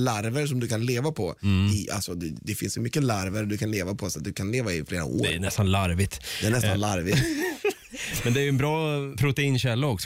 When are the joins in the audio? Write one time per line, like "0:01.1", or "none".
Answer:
none